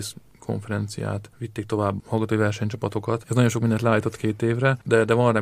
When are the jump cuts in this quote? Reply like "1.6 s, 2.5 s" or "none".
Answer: 2.0 s